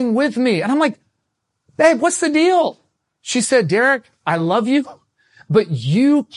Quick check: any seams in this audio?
no; 0 cuts

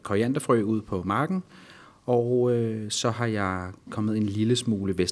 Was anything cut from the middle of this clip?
no; 0 cuts

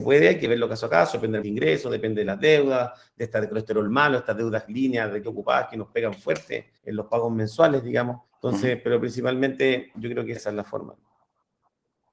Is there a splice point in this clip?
yes; 5 cuts; at 1.4 s, 5.2 s, 6.8 s, 8.3 s, 10.4 s

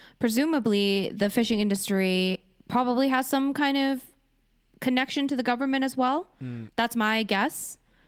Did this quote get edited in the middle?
no; 0 cuts

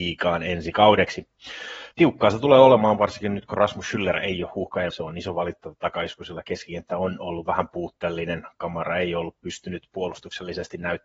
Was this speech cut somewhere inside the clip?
yes; 2 cuts; at 1.9 s, 4.9 s

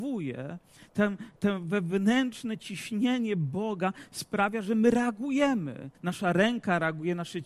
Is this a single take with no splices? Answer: no; 1 cut; at 5.9 s

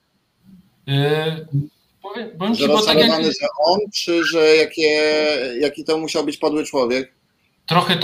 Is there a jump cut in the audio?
no; 0 cuts

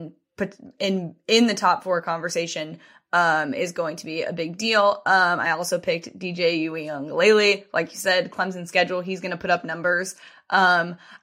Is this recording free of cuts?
yes; 0 cuts

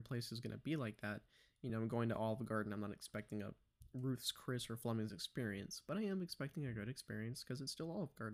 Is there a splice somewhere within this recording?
no; 0 cuts

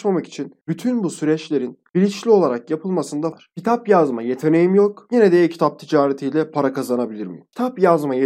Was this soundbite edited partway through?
yes; 1 cut; at 3.3 s

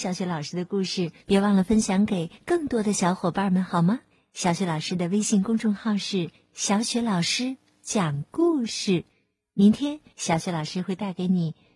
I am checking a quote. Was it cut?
yes; 6 cuts; at 1.2 s, 2.3 s, 4.1 s, 6.3 s, 9.1 s, 10.1 s

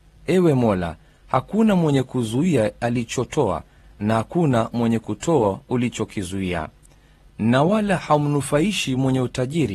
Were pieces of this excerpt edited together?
no; 0 cuts

